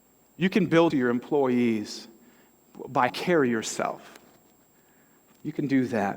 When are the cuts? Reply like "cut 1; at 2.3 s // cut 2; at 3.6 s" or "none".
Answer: cut 1; at 0.9 s // cut 2; at 3.1 s